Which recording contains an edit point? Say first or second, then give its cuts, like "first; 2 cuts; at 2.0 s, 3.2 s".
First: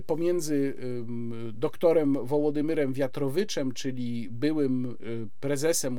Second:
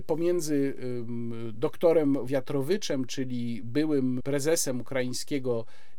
second; 2 cuts; at 2.3 s, 4.2 s